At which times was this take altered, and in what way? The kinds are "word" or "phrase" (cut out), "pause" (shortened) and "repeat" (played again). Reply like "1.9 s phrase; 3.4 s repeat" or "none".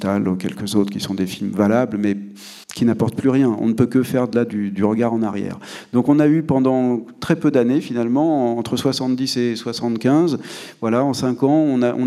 2.6 s pause